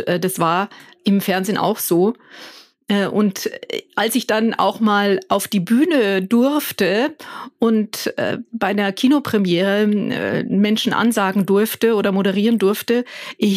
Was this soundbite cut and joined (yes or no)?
no